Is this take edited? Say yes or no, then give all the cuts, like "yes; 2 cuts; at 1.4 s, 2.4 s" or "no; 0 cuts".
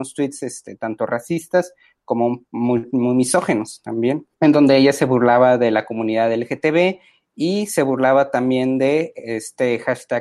yes; 2 cuts; at 2.5 s, 4.3 s